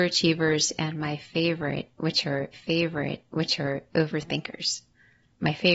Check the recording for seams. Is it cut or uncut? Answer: cut